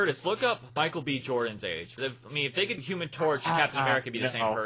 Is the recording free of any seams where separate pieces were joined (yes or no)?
no